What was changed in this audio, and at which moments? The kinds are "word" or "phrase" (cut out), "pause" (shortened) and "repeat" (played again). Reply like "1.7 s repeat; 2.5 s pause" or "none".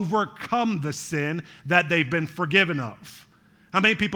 none